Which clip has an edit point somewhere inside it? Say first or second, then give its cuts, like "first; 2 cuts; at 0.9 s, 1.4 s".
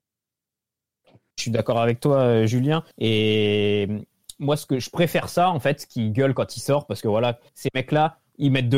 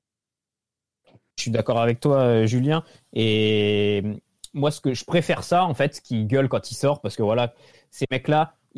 first; 2 cuts; at 2.9 s, 7.5 s